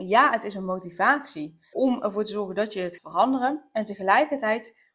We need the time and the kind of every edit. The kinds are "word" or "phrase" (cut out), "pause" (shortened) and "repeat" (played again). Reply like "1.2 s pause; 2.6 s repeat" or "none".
1.7 s word; 3.0 s word